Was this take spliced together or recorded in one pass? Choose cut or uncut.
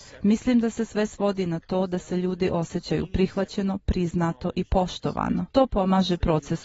cut